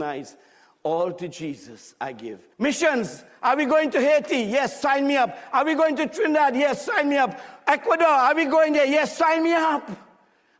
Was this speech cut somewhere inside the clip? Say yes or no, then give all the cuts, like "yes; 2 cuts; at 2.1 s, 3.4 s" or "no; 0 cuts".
yes; 1 cut; at 2.5 s